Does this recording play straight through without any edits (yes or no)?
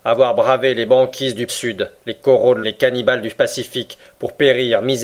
no